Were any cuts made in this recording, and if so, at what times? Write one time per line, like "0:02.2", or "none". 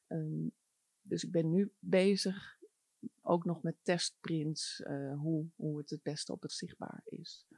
0:03.2
0:06.5

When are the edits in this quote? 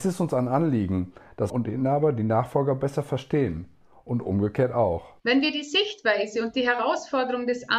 0:01.5
0:05.2

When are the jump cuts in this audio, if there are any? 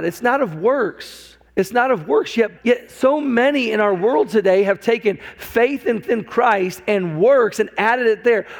0:01.5
0:02.6
0:06.0

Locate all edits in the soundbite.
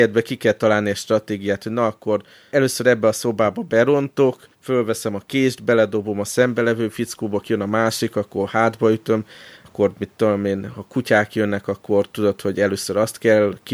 0:02.5
0:04.5
0:07.4
0:09.6

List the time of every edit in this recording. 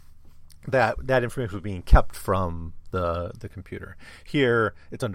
none

